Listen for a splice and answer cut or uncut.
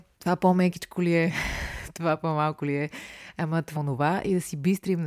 cut